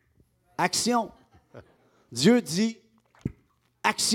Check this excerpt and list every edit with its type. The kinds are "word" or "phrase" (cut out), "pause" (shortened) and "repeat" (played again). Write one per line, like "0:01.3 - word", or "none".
0:01.8 - pause